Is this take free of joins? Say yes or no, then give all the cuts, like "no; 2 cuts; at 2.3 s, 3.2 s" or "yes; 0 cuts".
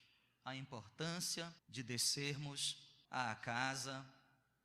no; 2 cuts; at 1.6 s, 3.0 s